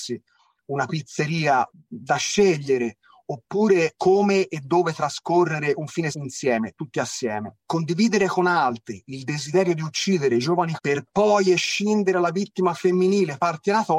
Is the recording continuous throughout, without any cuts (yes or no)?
no